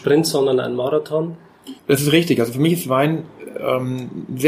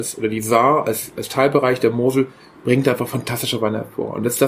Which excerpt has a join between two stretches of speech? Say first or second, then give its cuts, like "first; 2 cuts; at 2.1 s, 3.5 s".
first; 1 cut; at 1.8 s